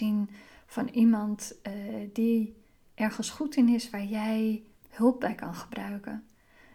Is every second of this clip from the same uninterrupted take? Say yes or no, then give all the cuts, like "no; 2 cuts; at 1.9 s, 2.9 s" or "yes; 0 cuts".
yes; 0 cuts